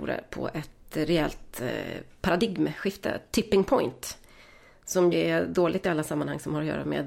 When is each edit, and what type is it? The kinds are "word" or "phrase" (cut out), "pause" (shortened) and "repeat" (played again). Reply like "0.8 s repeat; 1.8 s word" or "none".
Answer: 5.1 s word